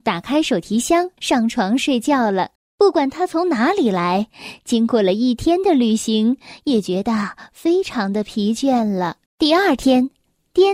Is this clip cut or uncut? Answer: cut